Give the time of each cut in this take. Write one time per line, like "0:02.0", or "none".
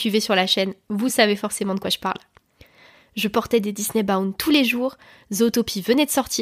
none